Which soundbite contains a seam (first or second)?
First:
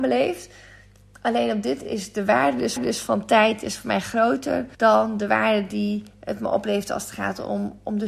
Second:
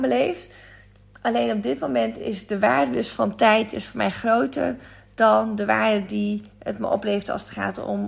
first